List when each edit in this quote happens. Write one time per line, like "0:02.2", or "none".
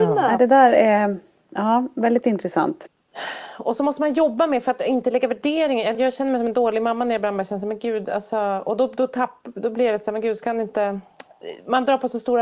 0:05.9